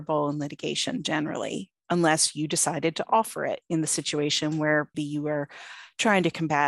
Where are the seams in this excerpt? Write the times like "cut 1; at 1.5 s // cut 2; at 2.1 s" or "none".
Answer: cut 1; at 4.9 s